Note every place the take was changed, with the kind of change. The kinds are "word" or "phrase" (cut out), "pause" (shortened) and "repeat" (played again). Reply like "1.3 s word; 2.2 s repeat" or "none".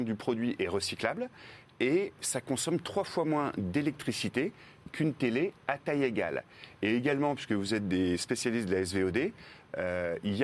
none